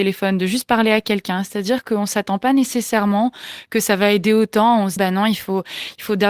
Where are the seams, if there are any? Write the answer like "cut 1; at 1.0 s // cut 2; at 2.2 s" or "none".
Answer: cut 1; at 5.0 s